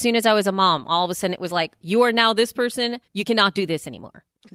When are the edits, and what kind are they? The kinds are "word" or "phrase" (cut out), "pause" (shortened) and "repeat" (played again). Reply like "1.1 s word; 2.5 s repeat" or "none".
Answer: 3.1 s pause